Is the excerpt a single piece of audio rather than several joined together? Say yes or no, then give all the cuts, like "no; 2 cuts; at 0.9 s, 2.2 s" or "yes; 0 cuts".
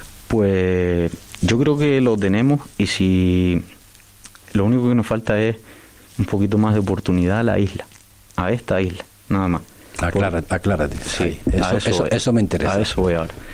yes; 0 cuts